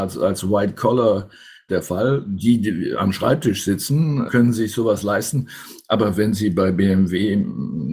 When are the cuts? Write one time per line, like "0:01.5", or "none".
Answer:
0:01.7
0:04.3